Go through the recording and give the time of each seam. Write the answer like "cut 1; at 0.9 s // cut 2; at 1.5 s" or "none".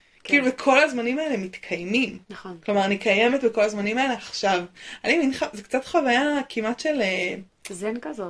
cut 1; at 2.2 s